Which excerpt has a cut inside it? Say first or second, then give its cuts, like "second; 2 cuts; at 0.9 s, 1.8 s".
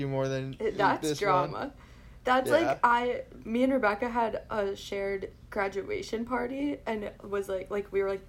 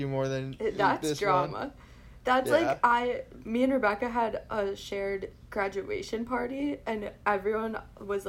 first; 1 cut; at 7.2 s